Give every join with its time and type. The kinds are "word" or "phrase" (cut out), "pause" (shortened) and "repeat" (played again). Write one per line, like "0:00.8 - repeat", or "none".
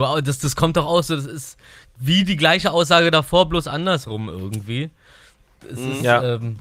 none